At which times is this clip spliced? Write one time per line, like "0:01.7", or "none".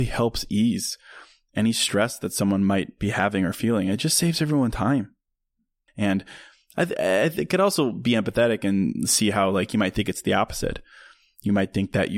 none